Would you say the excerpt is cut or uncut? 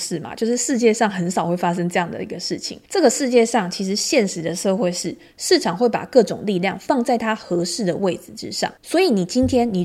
cut